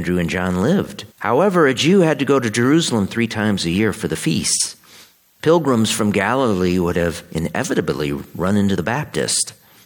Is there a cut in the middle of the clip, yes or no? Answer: yes